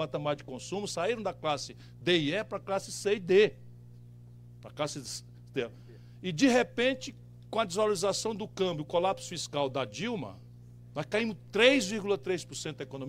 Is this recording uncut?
yes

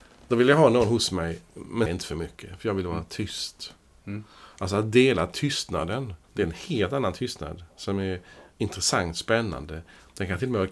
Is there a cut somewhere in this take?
yes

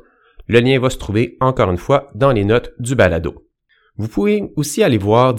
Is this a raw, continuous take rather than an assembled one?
yes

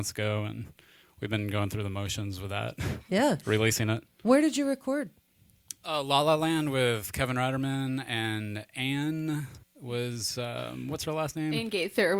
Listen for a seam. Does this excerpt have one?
yes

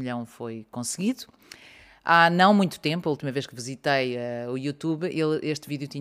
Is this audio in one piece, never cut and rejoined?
yes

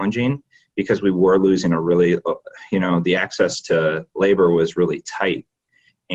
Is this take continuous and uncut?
yes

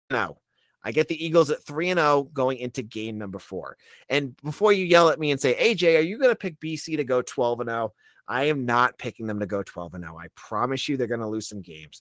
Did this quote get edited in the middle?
no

